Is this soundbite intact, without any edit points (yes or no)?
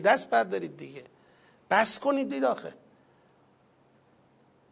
no